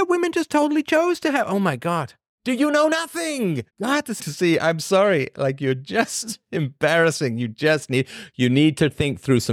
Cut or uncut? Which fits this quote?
cut